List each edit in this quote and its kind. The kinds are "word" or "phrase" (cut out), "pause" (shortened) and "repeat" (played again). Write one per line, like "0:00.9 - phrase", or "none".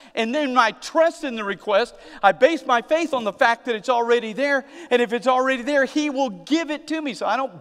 none